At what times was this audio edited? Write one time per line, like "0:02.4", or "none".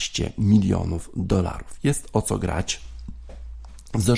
none